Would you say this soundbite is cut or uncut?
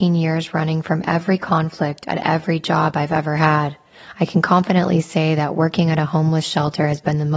uncut